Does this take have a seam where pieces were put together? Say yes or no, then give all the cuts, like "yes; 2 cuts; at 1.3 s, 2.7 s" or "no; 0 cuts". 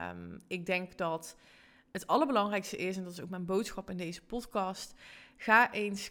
no; 0 cuts